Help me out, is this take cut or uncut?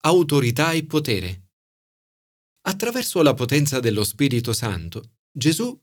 uncut